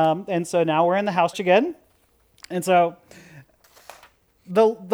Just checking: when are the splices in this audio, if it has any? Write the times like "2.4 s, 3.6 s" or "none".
1.3 s